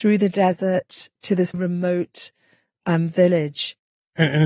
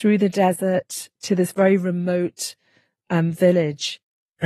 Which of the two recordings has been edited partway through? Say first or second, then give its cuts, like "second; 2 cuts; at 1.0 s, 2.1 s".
first; 1 cut; at 1.5 s